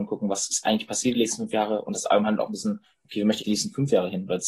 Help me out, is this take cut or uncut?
cut